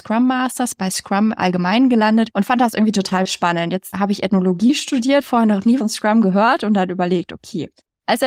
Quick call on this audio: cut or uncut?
cut